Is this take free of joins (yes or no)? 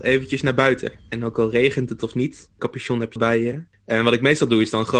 no